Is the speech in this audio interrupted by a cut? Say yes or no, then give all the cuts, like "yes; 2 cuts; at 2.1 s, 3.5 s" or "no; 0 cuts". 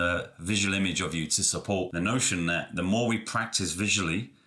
no; 0 cuts